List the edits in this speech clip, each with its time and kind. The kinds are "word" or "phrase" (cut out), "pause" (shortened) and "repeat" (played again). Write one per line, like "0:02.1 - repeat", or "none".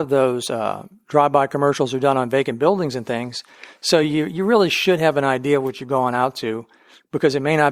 none